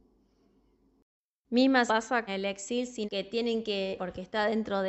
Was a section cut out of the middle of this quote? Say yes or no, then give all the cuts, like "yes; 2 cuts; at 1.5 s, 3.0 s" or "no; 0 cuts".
yes; 4 cuts; at 1.9 s, 2.3 s, 3.0 s, 4.0 s